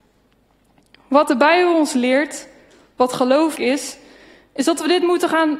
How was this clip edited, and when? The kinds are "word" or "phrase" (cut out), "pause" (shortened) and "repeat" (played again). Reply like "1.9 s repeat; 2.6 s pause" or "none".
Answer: 3.5 s word